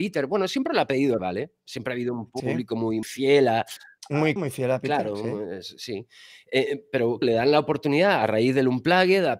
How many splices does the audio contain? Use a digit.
5